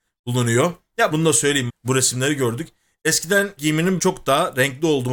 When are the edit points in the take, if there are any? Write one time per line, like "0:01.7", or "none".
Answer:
0:01.1
0:01.7
0:03.6
0:04.0